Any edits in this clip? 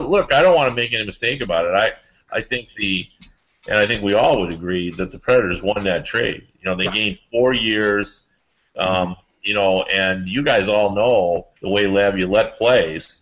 yes; 1 cut; at 11.6 s

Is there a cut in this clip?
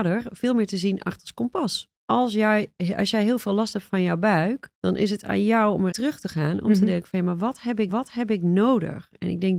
yes; 4 cuts; at 1.9 s, 4.7 s, 5.9 s, 7.9 s

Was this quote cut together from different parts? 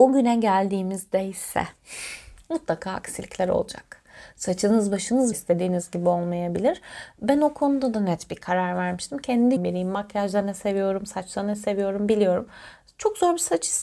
yes; 2 cuts; at 5.3 s, 9.6 s

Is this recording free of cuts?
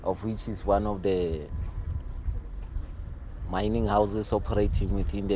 yes; 0 cuts

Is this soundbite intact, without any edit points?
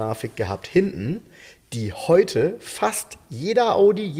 yes; 0 cuts

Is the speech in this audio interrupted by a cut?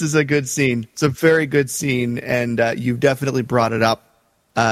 no; 0 cuts

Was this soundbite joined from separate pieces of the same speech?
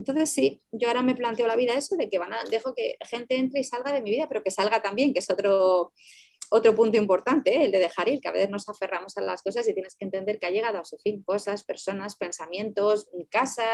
no; 0 cuts

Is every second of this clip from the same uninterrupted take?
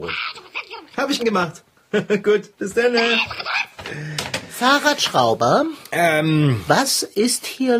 no; 2 cuts; at 1.2 s, 2.6 s

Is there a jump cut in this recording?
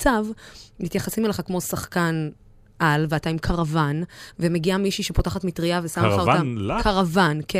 no; 0 cuts

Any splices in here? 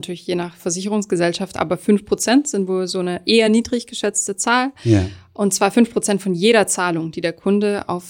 no; 0 cuts

